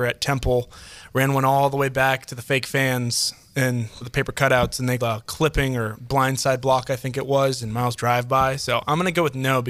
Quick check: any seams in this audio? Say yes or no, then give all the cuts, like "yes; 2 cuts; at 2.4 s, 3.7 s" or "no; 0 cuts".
yes; 3 cuts; at 4.0 s, 5.0 s, 8.0 s